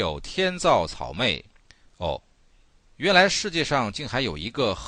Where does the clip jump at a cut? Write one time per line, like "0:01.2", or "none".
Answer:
0:01.6